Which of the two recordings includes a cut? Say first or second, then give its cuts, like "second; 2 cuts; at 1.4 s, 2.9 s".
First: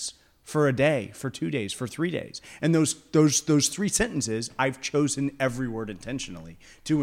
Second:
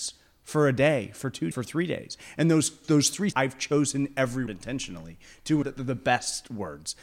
second; 5 cuts; at 1.5 s, 2.8 s, 3.3 s, 4.5 s, 5.6 s